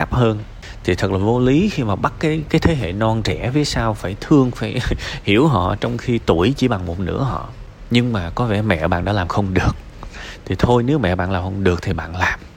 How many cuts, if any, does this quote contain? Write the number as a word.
zero